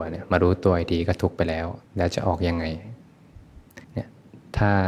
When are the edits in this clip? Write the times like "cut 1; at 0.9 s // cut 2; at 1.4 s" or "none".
cut 1; at 1.8 s // cut 2; at 3.8 s